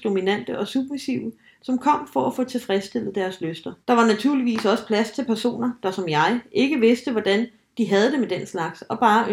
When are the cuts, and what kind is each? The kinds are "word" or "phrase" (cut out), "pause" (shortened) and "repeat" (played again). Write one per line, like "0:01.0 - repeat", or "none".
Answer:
0:03.8 - pause

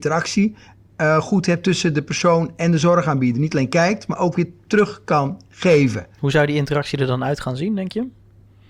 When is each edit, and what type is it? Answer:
none

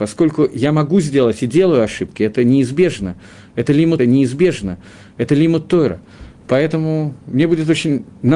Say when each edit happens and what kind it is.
0:04.0 - repeat

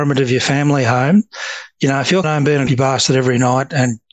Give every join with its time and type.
0:02.2 - word
0:02.7 - word

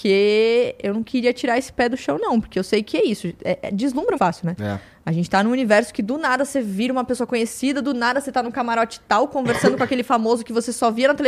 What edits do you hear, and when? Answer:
0:04.2 - word

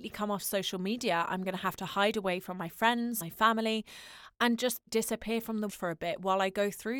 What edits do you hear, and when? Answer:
0:03.2 - word
0:04.9 - word
0:05.7 - word

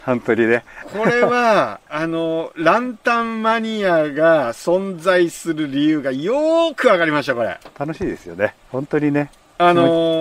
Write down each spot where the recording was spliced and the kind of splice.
0:07.7 - pause

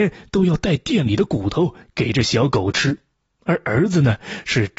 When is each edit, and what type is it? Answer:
0:03.1 - pause

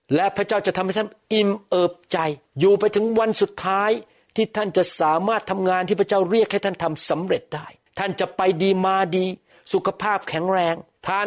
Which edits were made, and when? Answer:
none

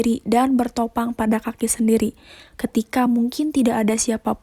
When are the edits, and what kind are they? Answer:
none

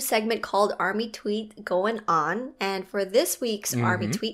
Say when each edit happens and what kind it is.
none

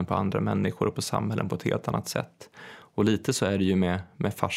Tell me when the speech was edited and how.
none

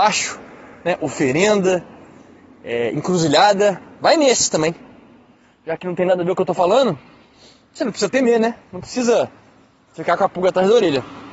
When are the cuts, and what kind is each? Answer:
none

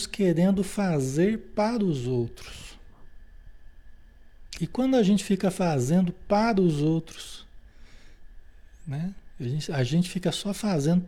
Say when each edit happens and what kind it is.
none

